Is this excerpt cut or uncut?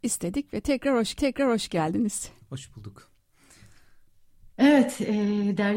cut